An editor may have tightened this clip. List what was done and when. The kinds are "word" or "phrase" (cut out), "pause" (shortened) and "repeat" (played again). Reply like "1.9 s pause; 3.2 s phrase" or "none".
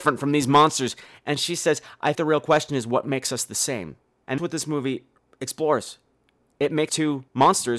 2.1 s word; 4.4 s word; 6.9 s word

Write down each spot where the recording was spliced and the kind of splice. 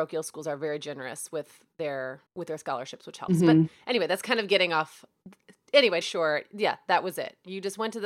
2.3 s pause; 6.0 s phrase

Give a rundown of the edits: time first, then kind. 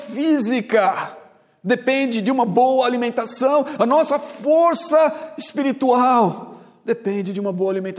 none

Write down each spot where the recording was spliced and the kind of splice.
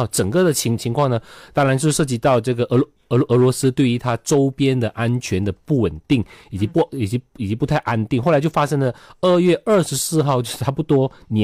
none

